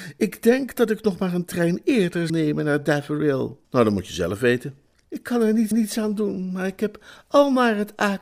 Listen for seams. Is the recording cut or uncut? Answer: cut